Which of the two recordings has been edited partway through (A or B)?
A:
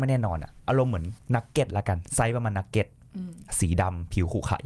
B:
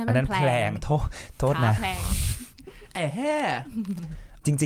A